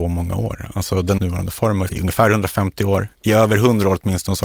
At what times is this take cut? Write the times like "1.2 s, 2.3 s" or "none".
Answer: 1.2 s, 1.9 s